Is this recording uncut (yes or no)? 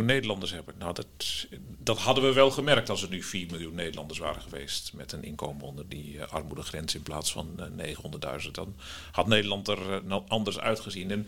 yes